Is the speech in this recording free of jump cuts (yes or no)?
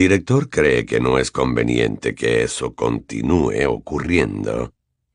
yes